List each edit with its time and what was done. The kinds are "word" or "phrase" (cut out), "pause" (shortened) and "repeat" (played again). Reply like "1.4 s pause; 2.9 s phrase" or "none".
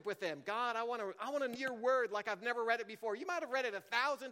1.6 s word